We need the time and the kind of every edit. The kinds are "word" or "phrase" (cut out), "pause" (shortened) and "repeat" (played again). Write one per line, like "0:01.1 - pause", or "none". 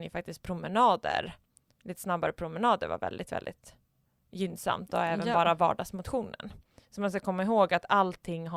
none